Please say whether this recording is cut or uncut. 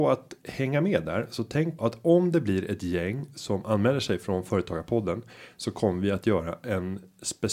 cut